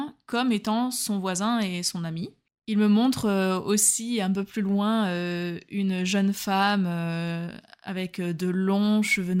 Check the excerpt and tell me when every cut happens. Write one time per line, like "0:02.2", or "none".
none